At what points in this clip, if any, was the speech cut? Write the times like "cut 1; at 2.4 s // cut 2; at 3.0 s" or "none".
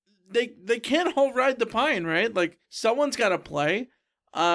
cut 1; at 2.6 s